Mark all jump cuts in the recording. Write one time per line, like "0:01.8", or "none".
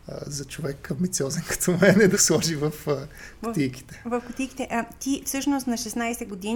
0:02.1